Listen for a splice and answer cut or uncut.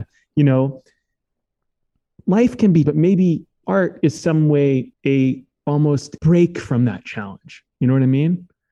cut